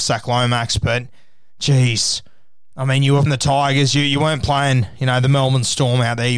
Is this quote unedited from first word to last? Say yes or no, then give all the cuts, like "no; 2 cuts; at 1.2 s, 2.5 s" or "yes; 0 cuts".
no; 1 cut; at 3.3 s